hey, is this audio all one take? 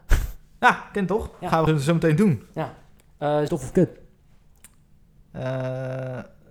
no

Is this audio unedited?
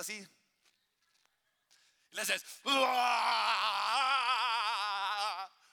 yes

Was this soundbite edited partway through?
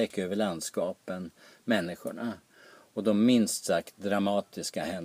no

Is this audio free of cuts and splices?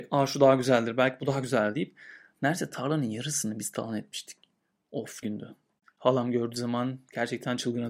no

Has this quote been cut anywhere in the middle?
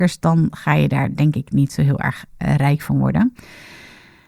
no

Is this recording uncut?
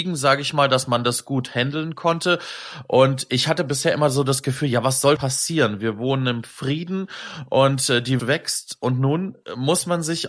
no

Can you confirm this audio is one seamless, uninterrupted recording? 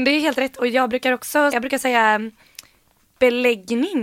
no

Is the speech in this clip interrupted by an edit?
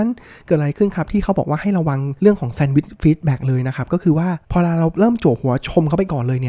yes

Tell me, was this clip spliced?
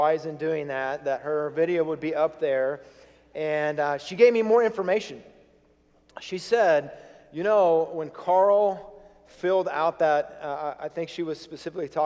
no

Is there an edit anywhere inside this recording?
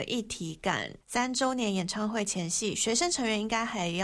yes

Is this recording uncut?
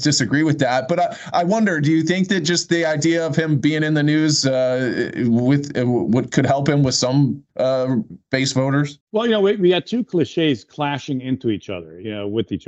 no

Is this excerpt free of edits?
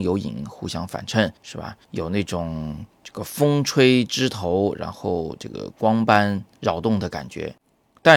no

